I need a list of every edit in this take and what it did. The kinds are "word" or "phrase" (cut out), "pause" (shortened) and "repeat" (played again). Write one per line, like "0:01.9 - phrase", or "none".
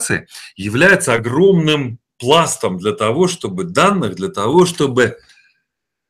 0:02.1 - pause